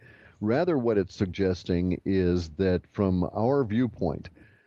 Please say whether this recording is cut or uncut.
uncut